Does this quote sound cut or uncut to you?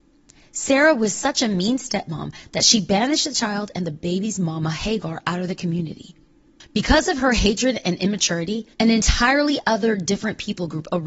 cut